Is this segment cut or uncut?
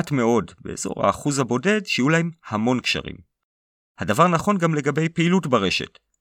uncut